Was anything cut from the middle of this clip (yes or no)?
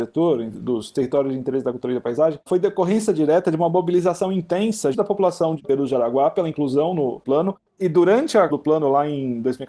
yes